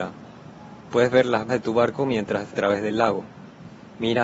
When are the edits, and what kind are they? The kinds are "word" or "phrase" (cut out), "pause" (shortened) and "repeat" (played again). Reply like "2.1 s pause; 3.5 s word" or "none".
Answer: 1.5 s word; 2.5 s phrase